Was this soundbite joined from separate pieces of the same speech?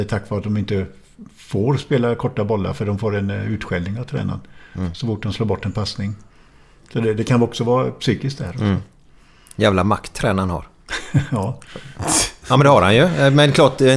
no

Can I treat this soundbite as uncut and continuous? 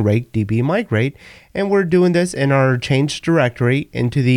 yes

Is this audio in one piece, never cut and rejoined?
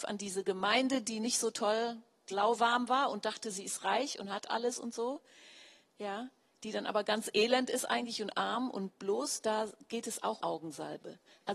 no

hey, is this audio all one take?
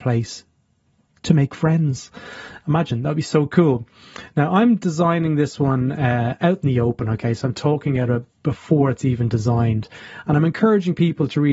yes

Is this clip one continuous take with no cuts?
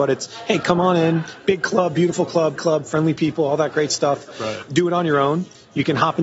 no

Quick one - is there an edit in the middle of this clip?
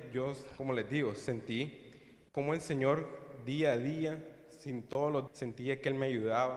yes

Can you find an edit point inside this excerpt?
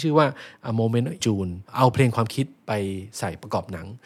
yes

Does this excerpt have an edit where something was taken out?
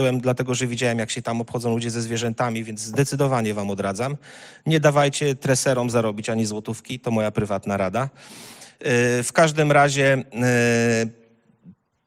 no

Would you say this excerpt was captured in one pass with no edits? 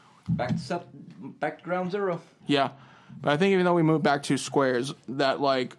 yes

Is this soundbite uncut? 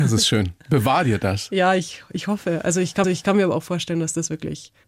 no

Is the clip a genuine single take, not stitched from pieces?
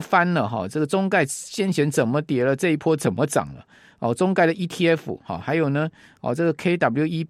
yes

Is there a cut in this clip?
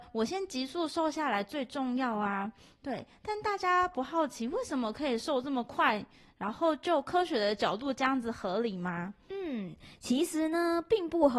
no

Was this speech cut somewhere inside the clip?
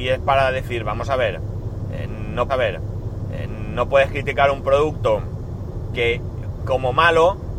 yes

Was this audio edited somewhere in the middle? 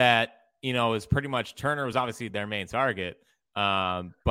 no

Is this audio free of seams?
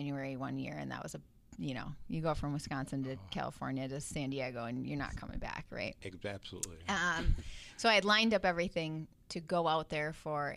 yes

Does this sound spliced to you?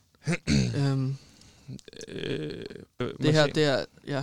yes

